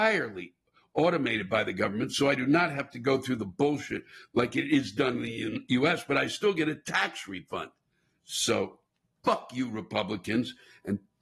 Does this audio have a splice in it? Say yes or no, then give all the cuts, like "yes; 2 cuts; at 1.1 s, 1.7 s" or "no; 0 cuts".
no; 0 cuts